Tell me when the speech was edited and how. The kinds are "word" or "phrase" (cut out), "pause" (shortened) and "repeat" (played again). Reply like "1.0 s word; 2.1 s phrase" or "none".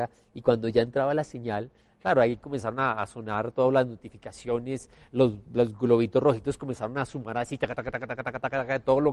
none